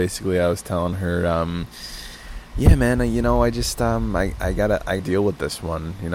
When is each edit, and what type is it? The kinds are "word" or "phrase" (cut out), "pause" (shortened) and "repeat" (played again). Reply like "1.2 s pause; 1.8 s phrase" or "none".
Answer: 5.0 s word